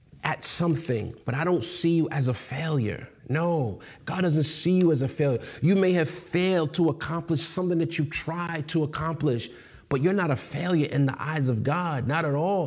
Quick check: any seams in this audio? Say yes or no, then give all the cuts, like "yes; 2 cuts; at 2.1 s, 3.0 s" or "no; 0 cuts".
yes; 2 cuts; at 1.2 s, 3.2 s